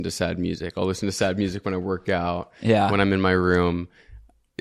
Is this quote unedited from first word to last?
yes; 0 cuts

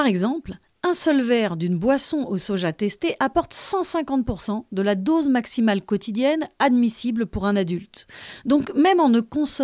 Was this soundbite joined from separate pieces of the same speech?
no; 0 cuts

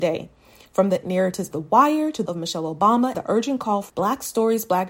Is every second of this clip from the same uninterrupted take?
no; 5 cuts; at 1.0 s, 1.5 s, 2.3 s, 3.1 s, 3.9 s

